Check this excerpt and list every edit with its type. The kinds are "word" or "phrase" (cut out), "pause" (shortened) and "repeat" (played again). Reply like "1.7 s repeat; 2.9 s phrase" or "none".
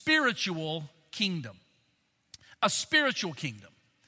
none